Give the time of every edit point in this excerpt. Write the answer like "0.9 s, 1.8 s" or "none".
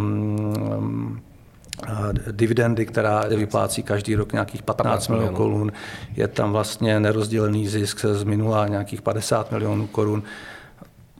3.3 s

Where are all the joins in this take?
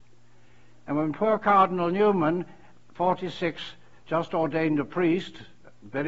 none

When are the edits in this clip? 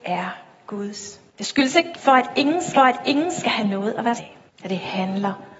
1.3 s, 1.9 s, 2.7 s, 4.2 s, 4.5 s

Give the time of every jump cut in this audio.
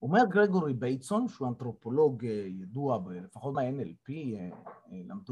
3.5 s

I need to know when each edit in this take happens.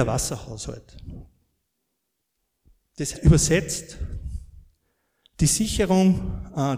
3.1 s

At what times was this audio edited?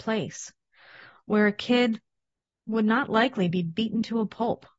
none

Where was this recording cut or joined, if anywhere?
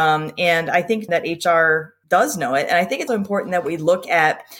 1.1 s, 2.0 s, 3.1 s

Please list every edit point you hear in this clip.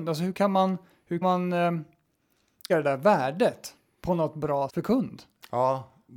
1.2 s, 2.7 s, 4.7 s

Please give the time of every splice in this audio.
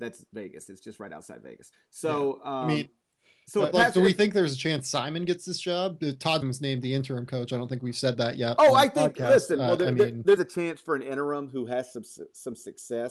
3.7 s, 6.4 s, 10.4 s

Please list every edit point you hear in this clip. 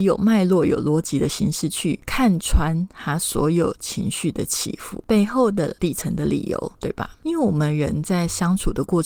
6.7 s

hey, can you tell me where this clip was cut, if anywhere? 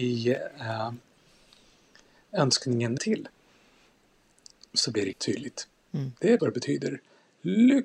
3.0 s, 5.1 s, 6.4 s

